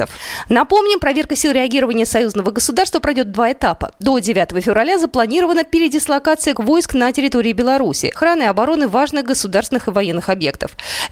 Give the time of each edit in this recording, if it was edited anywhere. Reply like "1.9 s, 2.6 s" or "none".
6.5 s, 8.1 s